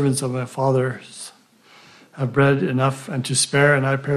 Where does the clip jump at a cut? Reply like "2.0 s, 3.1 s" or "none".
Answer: none